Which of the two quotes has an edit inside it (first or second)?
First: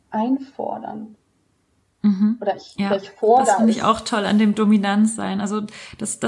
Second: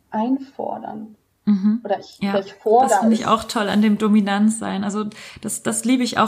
second